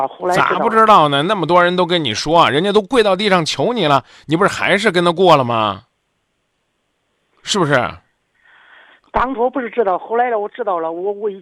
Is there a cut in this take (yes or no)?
no